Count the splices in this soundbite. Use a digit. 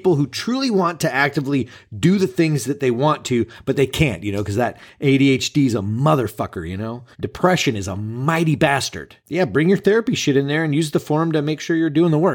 1